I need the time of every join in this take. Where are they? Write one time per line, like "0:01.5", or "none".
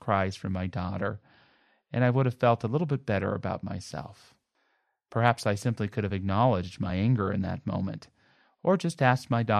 none

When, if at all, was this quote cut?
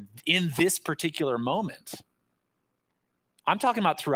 none

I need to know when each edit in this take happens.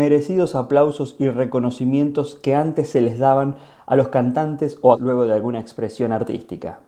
0:04.9

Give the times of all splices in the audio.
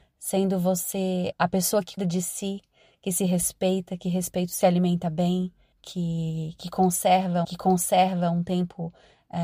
0:01.3
0:02.0
0:04.6
0:05.7
0:07.4

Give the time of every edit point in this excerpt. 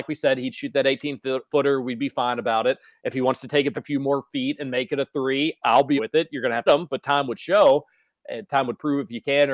0:03.7
0:06.0
0:06.7

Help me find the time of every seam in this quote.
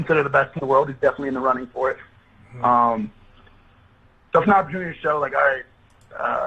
0:04.4

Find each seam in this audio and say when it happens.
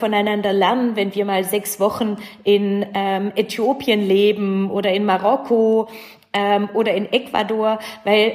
none

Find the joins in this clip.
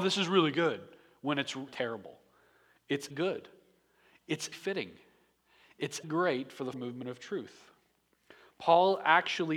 0:01.7
0:03.1
0:04.5
0:06.0
0:06.7

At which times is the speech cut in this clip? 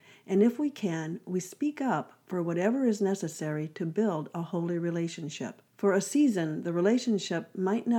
0:05.7

